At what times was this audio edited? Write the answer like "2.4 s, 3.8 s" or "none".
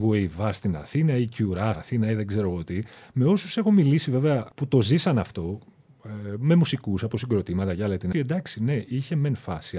1.7 s, 4.5 s, 8.1 s